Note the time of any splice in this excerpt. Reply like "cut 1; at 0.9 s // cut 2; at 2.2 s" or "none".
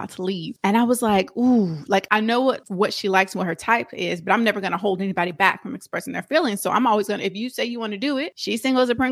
none